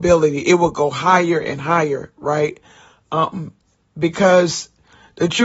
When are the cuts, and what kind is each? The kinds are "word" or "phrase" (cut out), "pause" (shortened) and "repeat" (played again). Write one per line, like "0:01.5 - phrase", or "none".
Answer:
none